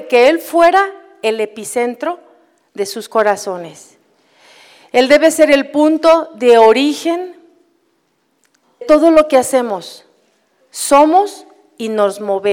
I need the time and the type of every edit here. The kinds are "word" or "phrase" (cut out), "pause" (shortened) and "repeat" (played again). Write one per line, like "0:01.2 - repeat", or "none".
0:08.8 - word